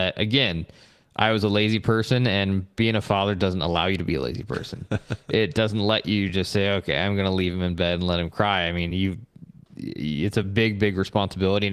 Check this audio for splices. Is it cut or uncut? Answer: uncut